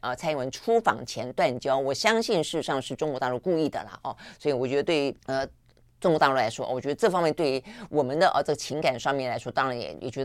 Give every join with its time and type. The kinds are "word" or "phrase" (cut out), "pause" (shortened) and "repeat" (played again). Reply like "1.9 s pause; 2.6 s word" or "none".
5.2 s pause